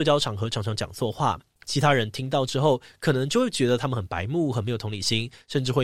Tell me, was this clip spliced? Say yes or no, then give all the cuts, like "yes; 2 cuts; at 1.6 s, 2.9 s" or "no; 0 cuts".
no; 0 cuts